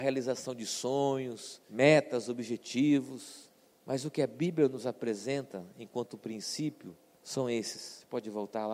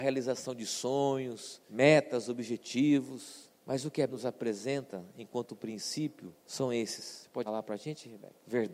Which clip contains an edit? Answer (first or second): second